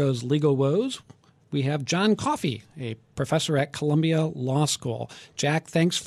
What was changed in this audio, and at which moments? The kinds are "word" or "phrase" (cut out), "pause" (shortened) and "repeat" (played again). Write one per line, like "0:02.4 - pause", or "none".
none